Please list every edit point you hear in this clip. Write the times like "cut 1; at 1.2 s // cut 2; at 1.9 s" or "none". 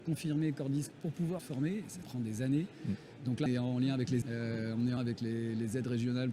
cut 1; at 0.9 s // cut 2; at 1.4 s // cut 3; at 2.0 s // cut 4; at 3.5 s // cut 5; at 4.2 s // cut 6; at 5.0 s